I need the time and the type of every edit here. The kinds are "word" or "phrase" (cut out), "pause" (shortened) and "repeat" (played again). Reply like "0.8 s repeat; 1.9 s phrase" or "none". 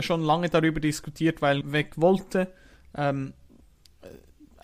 1.6 s word

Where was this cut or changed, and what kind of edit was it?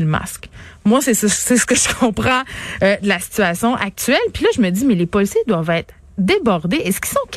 none

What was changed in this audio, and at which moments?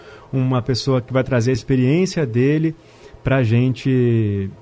none

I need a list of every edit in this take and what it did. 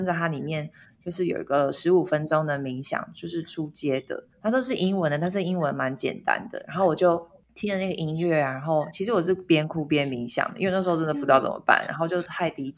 4.3 s pause

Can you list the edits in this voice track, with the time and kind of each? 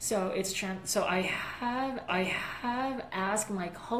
2.1 s repeat

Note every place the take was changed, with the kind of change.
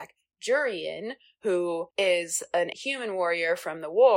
1.9 s pause; 2.7 s word

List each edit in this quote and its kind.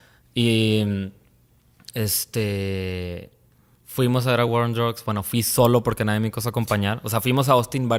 none

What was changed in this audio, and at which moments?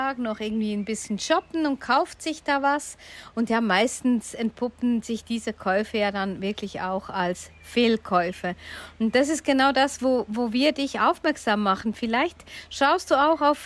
none

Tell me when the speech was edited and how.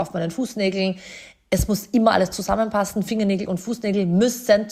none

